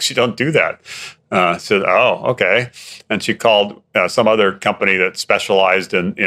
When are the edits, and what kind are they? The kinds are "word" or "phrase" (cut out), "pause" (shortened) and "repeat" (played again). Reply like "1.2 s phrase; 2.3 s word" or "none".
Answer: none